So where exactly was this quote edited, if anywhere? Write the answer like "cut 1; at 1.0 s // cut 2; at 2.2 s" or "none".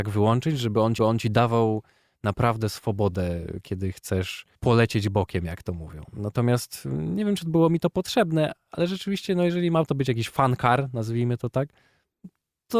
cut 1; at 1.0 s // cut 2; at 4.6 s